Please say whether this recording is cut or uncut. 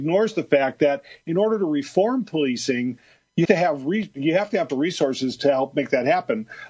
cut